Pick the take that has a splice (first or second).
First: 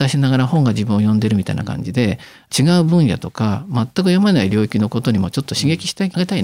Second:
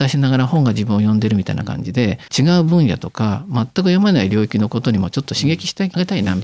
second